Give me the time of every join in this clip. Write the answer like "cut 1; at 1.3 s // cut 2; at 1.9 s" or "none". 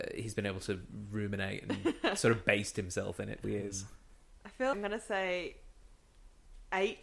cut 1; at 3.4 s // cut 2; at 4.7 s